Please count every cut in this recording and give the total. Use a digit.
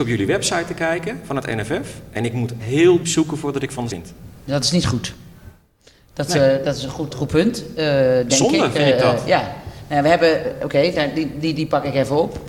7